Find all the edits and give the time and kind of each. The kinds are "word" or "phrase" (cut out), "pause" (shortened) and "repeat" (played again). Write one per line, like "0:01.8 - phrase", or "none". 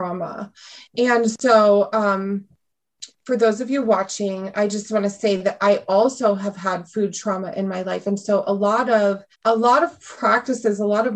0:09.3 - pause